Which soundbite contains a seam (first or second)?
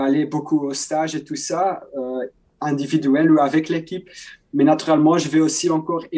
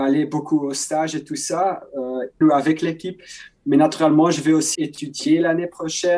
second